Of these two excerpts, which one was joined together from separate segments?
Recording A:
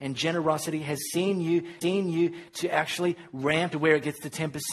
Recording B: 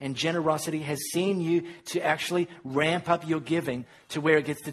A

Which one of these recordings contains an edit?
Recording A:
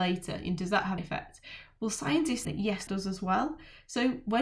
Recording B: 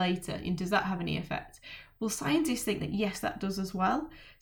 A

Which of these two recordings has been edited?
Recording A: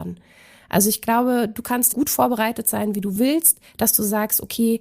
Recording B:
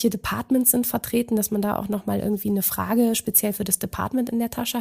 A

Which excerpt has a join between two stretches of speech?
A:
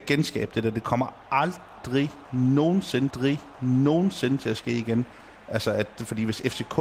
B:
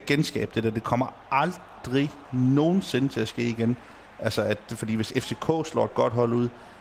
A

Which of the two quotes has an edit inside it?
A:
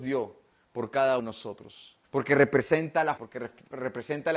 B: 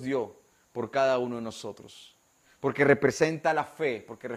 A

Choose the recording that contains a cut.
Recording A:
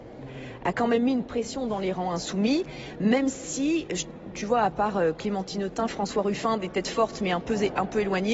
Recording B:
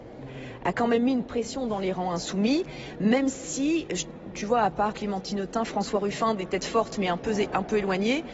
B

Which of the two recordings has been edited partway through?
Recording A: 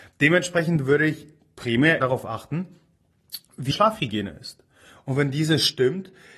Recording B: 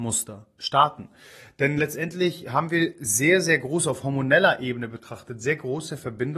A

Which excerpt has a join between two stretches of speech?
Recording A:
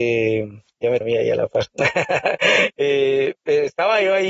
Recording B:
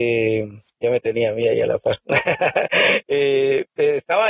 A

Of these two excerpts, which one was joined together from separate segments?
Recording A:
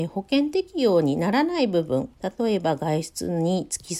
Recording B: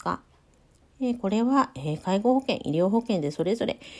A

